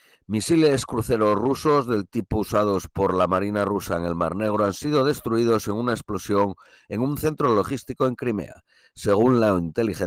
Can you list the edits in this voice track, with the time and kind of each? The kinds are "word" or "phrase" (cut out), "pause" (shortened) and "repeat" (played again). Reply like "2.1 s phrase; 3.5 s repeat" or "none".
none